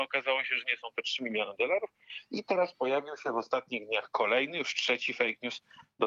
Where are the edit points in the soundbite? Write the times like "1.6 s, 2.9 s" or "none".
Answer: none

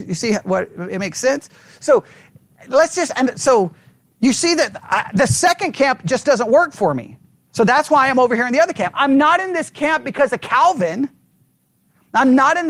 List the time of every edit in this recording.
none

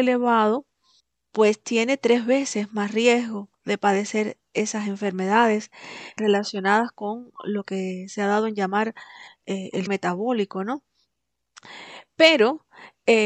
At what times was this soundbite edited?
1.0 s, 3.5 s, 6.2 s, 9.9 s

